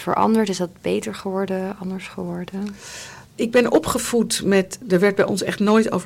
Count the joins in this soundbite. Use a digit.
1